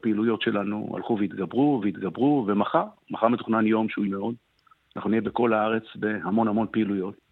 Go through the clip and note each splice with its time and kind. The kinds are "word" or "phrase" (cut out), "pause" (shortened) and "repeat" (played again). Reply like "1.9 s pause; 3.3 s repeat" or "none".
1.8 s repeat; 4.1 s phrase